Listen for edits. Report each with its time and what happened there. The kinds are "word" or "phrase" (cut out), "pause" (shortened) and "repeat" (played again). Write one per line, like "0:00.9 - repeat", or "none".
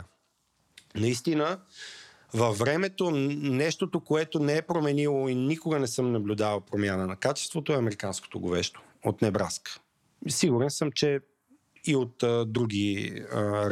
none